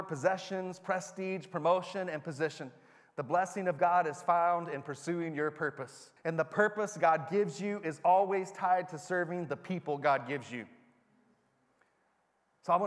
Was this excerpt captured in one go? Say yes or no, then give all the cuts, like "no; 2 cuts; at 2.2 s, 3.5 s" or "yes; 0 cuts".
no; 1 cut; at 6.2 s